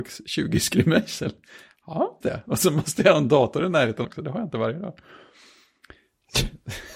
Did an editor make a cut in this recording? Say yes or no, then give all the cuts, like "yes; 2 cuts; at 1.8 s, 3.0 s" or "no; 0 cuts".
yes; 2 cuts; at 2.2 s, 4.0 s